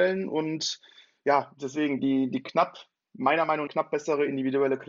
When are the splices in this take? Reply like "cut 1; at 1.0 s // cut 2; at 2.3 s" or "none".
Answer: cut 1; at 2.0 s // cut 2; at 3.7 s

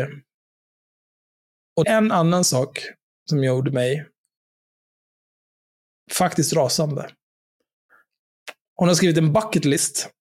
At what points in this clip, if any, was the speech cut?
cut 1; at 1.8 s

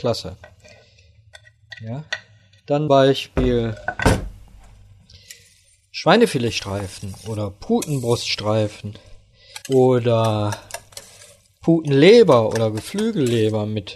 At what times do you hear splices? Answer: cut 1; at 2.9 s // cut 2; at 9.6 s

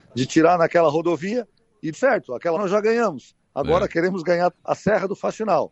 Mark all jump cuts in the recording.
cut 1; at 1.9 s // cut 2; at 2.6 s // cut 3; at 4.5 s

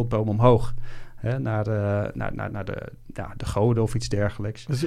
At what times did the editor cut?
none

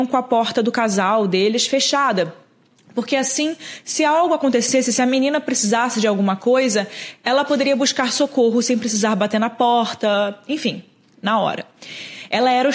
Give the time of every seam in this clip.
none

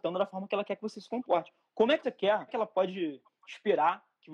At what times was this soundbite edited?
cut 1; at 2.0 s // cut 2; at 2.5 s

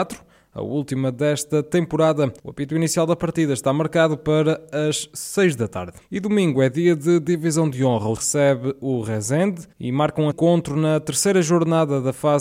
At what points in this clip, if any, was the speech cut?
cut 1; at 2.4 s // cut 2; at 6.0 s // cut 3; at 8.2 s // cut 4; at 9.7 s // cut 5; at 10.3 s

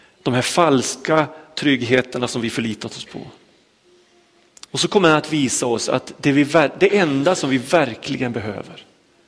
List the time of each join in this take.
cut 1; at 4.7 s

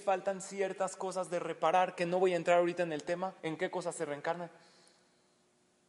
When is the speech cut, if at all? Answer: cut 1; at 3.4 s

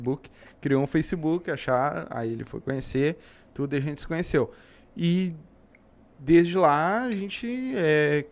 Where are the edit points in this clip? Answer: none

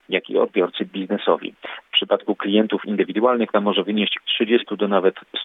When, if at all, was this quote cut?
cut 1; at 3.5 s // cut 2; at 4.2 s

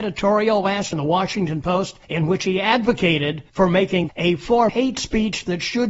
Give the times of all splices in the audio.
cut 1; at 0.9 s // cut 2; at 2.0 s // cut 3; at 3.5 s // cut 4; at 4.1 s // cut 5; at 4.7 s

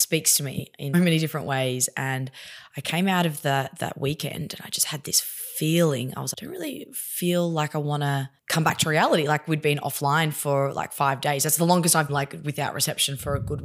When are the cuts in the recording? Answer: cut 1; at 0.9 s // cut 2; at 6.3 s // cut 3; at 8.4 s // cut 4; at 12.1 s

